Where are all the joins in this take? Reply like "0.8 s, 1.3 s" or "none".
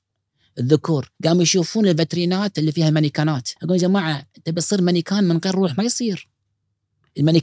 1.2 s, 3.6 s